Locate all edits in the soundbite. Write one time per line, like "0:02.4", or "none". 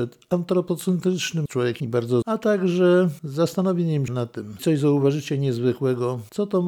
0:01.5
0:01.8
0:02.2
0:04.1
0:04.6